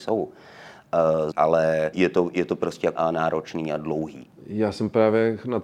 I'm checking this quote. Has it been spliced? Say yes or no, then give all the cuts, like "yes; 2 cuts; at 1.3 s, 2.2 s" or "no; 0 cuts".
yes; 3 cuts; at 1.3 s, 1.9 s, 3.0 s